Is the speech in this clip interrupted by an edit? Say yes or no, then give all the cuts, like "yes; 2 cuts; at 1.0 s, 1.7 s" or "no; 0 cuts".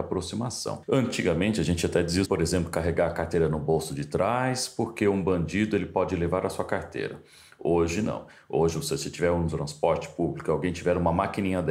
yes; 1 cut; at 2.2 s